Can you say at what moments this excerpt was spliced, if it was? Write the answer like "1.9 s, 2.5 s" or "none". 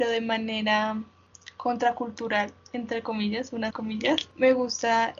3.7 s